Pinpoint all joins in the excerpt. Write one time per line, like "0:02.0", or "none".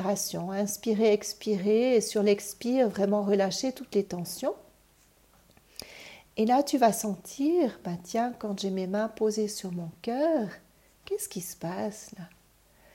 none